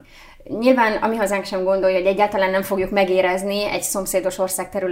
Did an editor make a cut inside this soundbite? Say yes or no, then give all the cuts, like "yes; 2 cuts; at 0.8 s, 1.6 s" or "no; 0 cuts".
no; 0 cuts